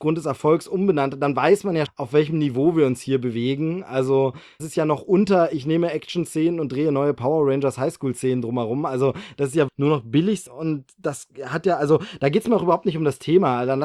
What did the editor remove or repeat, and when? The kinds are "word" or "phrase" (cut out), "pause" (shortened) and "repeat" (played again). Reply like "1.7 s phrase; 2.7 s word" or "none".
1.9 s word; 4.6 s word; 9.7 s word; 10.5 s word